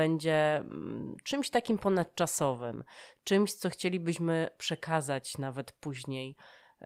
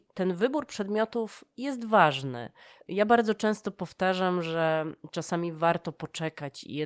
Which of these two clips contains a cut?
second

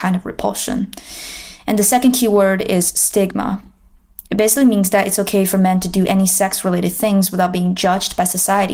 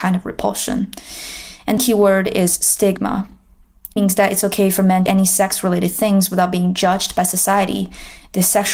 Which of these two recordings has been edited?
second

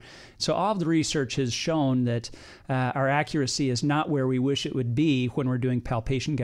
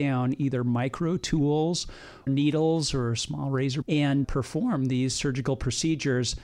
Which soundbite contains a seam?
second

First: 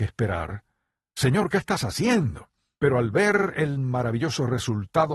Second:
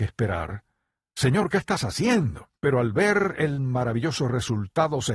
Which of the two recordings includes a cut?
second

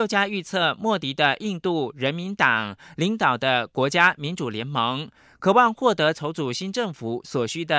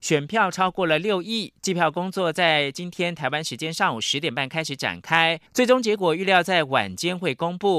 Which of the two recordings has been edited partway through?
second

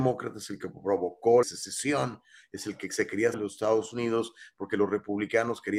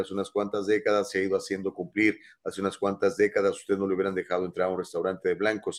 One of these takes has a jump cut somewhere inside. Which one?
first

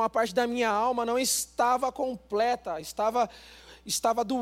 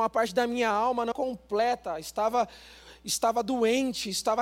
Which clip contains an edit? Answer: second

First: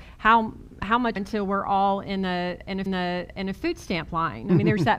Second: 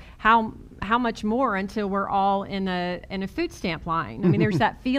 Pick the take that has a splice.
first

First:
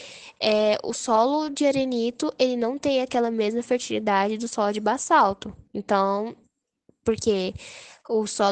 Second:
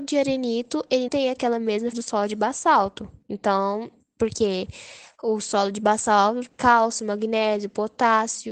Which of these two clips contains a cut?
second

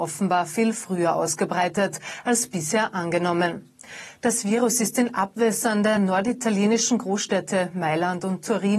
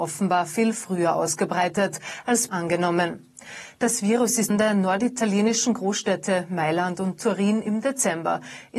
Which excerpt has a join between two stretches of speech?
second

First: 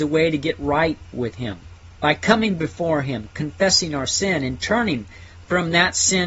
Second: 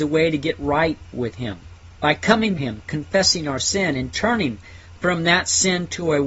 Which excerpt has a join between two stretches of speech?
second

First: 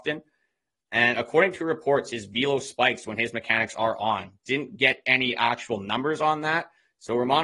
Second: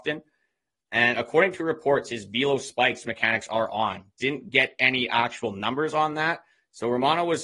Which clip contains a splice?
second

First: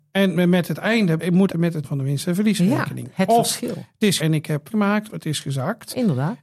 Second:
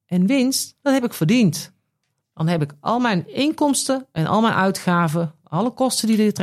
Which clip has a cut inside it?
first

